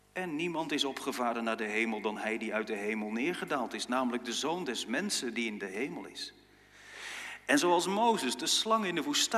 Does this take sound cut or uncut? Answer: uncut